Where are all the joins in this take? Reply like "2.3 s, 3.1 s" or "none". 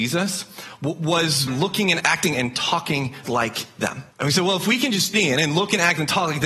1.5 s, 2.0 s, 3.2 s, 4.1 s, 5.1 s